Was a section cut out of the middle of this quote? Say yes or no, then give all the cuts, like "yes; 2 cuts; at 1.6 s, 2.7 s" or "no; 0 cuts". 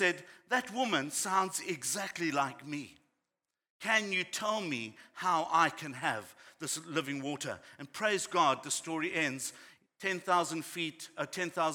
no; 0 cuts